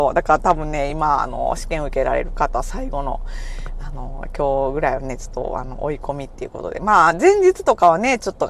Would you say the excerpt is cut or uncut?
uncut